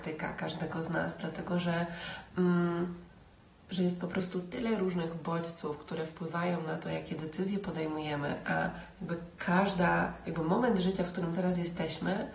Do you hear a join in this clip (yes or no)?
no